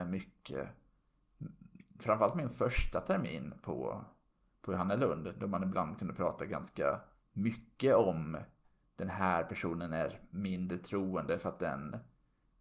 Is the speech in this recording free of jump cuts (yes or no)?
yes